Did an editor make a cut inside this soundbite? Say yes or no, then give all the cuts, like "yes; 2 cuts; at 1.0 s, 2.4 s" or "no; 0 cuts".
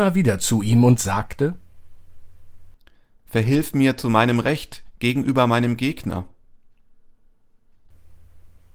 no; 0 cuts